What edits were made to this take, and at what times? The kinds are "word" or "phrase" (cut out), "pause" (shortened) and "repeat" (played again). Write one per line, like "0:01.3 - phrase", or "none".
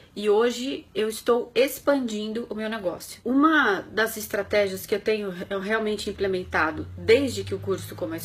none